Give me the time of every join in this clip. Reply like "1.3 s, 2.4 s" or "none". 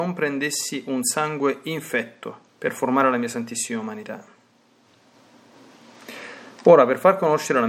2.5 s